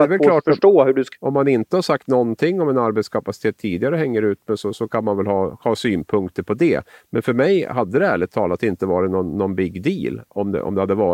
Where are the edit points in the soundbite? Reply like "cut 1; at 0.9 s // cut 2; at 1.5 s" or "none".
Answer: cut 1; at 1.1 s